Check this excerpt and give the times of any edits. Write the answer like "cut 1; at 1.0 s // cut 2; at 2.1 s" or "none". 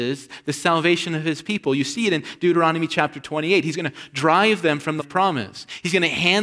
cut 1; at 5.0 s